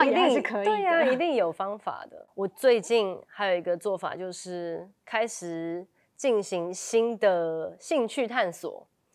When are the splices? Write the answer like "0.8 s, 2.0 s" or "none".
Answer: 5.0 s